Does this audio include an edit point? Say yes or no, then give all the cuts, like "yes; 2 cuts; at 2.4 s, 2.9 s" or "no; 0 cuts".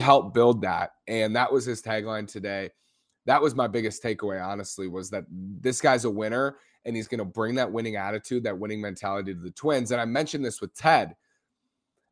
no; 0 cuts